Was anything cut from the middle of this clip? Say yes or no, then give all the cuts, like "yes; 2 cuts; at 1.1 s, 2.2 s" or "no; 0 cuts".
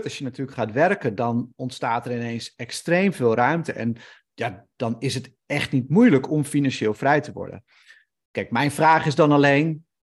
no; 0 cuts